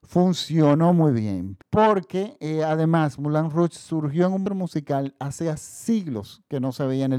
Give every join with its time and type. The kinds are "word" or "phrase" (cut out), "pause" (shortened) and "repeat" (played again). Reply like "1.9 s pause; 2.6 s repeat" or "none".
1.6 s pause; 4.5 s phrase